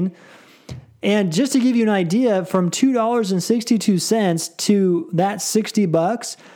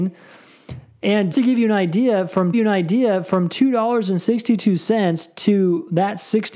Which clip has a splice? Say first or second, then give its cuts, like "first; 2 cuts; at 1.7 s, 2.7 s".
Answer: second; 2 cuts; at 1.3 s, 2.5 s